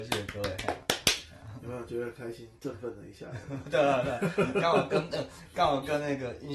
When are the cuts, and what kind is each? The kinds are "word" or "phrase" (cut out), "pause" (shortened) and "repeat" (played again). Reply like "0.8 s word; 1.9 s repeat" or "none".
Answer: none

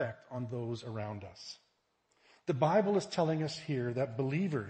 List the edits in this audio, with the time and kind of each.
2.1 s pause

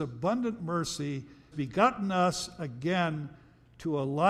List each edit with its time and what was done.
1.5 s word

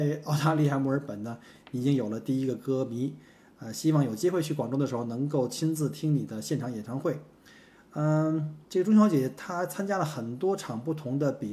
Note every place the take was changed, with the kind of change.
8.6 s pause

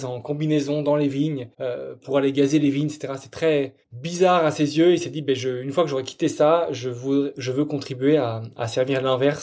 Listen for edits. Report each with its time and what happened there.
1.5 s pause; 3.8 s pause

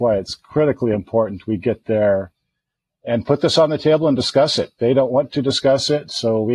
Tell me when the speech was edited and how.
none

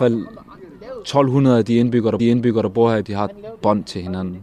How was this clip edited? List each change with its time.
2.2 s repeat; 3.0 s word

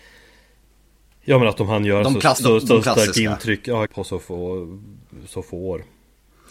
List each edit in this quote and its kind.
2.4 s word; 3.9 s word

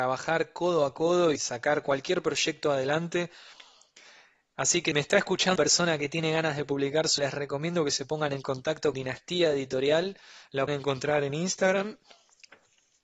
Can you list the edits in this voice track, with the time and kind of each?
1.4 s word; 4.9 s word; 5.6 s word; 7.2 s word; 8.9 s word; 10.7 s word

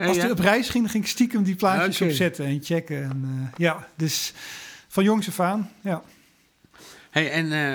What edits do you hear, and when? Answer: none

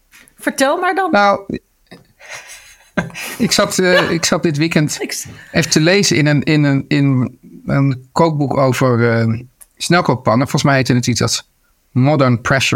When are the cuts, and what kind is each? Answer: none

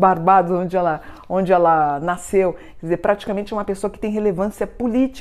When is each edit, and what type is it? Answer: none

